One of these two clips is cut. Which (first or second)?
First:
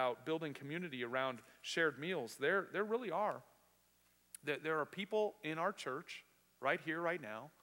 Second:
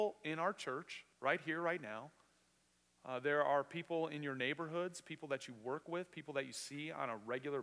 second